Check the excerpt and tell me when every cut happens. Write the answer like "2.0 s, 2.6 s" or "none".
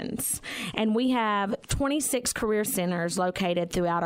2.7 s